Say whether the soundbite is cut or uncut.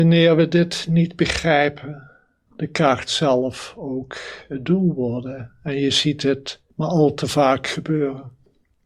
cut